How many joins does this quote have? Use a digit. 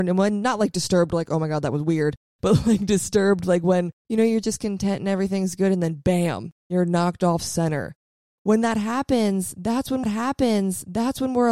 1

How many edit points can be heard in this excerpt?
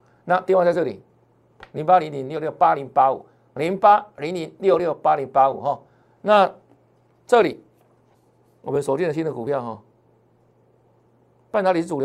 1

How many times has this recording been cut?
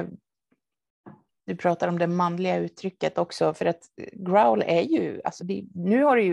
1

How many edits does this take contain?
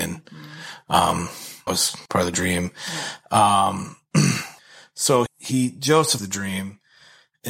5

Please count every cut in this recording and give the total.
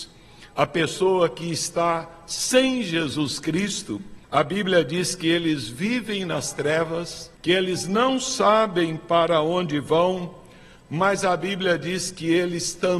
2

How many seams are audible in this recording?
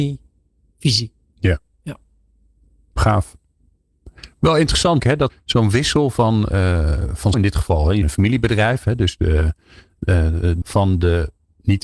6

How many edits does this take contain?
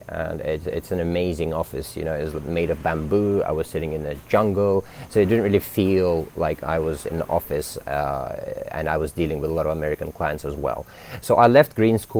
0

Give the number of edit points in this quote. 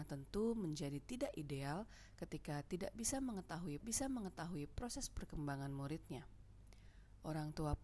1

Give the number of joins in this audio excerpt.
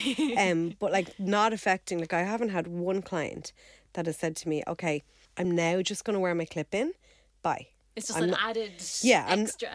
0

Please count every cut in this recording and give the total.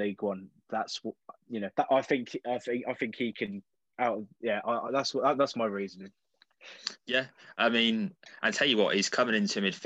2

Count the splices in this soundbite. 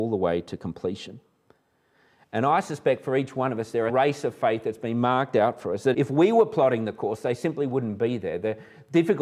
2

